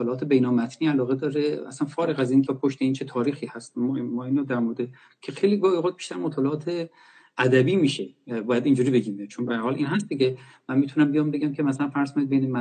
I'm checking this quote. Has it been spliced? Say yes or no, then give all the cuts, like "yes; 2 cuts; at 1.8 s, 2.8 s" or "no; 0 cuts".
yes; 1 cut; at 2.5 s